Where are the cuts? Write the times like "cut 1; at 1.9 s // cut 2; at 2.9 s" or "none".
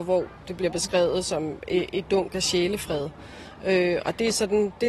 cut 1; at 2.0 s